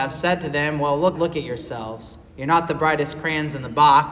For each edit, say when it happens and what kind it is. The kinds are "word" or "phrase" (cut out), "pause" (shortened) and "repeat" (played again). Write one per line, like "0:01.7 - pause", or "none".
0:01.1 - word
0:02.3 - pause